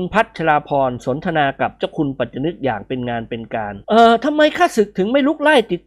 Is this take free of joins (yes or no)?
no